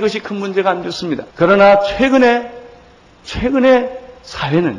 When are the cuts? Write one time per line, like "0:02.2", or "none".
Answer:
0:01.3

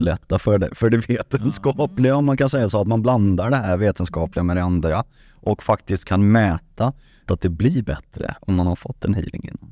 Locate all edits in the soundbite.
0:07.3

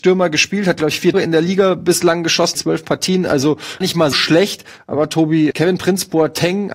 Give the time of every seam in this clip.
0:01.1
0:02.5
0:03.8
0:04.1
0:05.5

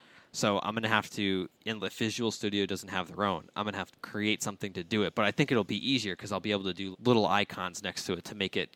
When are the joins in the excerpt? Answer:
0:03.9
0:06.9

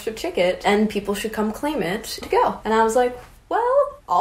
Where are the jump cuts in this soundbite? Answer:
0:02.2

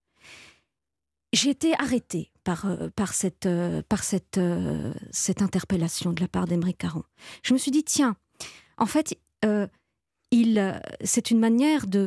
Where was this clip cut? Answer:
none

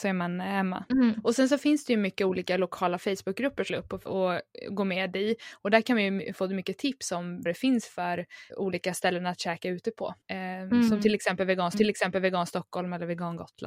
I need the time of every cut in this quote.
0:03.7
0:04.1
0:07.5
0:08.5
0:10.2
0:11.7

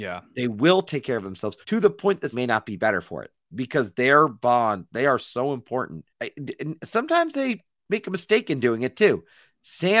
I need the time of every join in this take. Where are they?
0:01.6
0:02.3
0:06.1

